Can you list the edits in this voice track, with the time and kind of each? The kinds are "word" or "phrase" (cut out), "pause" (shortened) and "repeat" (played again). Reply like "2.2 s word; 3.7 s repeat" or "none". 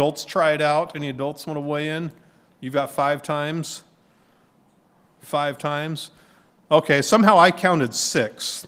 none